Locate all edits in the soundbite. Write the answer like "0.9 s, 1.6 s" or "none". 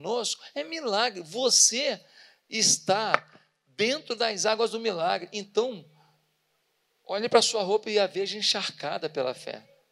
none